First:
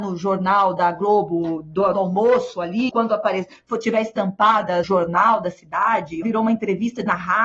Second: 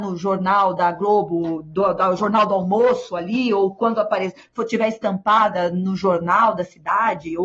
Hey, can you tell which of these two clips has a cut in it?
first; 4 cuts; at 1.9 s, 2.9 s, 4.8 s, 6.2 s

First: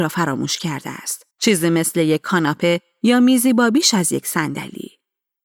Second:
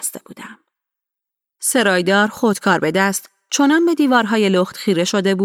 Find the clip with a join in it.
first; 1 cut; at 1.3 s

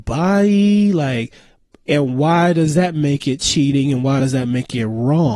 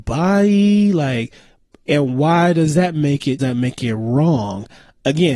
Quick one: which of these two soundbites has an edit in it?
second; 1 cut; at 3.4 s

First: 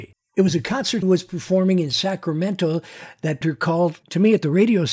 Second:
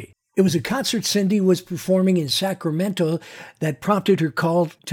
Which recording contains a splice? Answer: first; 2 cuts; at 1.0 s, 3.4 s

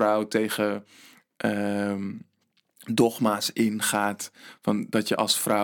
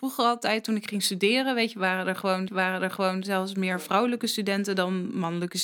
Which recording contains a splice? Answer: second; 1 cut; at 2.5 s

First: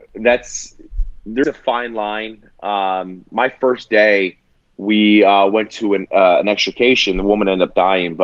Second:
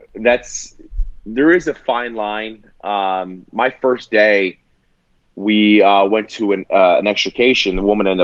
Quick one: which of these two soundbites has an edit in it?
first; 2 cuts; at 1.4 s, 4.6 s

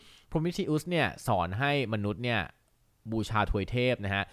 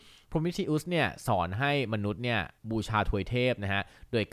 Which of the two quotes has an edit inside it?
second; 1 cut; at 2.6 s

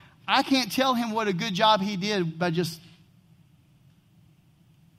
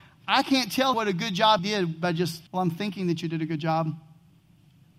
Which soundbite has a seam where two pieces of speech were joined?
second; 3 cuts; at 0.9 s, 1.6 s, 2.5 s

